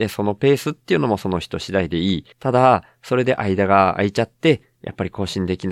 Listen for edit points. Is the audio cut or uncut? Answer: cut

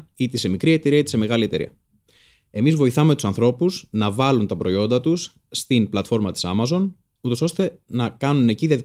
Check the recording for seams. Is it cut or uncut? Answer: uncut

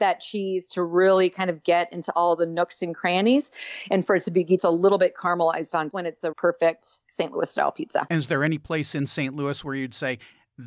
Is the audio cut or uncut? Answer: cut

